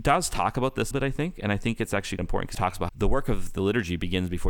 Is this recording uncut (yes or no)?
no